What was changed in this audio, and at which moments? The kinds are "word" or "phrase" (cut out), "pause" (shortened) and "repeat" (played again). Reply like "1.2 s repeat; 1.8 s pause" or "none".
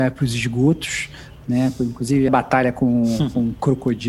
2.3 s phrase